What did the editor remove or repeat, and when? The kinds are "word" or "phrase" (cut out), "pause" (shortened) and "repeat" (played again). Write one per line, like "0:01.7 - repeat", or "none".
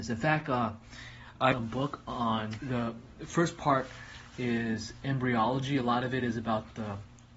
0:01.5 - phrase
0:02.6 - word